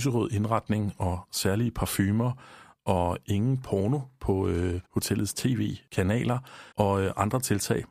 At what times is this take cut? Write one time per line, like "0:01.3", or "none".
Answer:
0:04.8
0:06.7